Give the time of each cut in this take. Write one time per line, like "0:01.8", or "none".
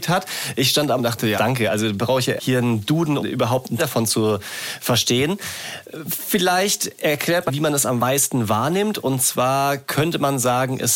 0:01.0
0:01.4
0:02.4
0:03.2
0:03.8
0:07.5